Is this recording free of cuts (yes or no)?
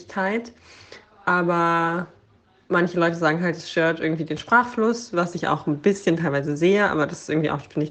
yes